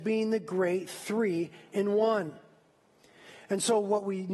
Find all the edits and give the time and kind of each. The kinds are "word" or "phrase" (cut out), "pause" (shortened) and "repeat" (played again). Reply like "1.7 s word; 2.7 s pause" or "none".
none